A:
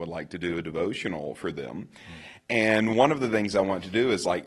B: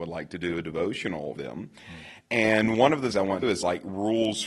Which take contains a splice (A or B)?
B